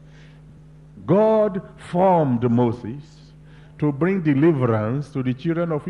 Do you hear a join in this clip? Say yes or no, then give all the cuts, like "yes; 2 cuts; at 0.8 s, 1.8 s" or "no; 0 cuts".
no; 0 cuts